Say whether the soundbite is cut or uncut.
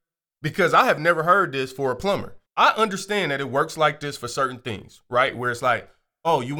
cut